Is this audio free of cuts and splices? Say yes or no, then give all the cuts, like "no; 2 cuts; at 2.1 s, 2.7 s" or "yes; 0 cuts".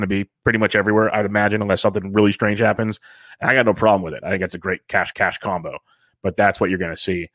no; 1 cut; at 5.1 s